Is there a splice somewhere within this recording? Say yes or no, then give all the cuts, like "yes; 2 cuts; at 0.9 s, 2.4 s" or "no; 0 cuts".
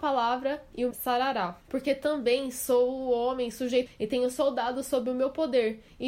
yes; 3 cuts; at 0.9 s, 1.6 s, 3.9 s